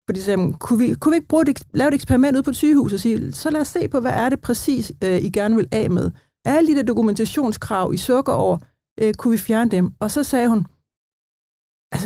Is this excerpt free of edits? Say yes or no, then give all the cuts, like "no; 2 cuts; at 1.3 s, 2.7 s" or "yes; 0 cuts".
yes; 0 cuts